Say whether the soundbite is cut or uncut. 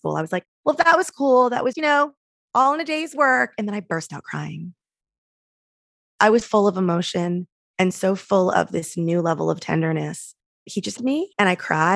cut